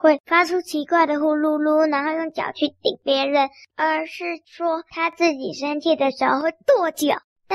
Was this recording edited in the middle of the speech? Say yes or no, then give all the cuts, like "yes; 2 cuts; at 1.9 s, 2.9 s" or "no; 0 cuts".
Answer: no; 0 cuts